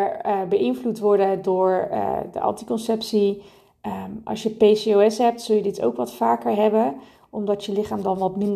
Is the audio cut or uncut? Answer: uncut